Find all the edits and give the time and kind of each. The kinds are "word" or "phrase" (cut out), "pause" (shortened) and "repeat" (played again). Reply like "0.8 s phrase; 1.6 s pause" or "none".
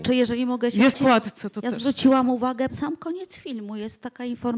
0.9 s word; 2.7 s word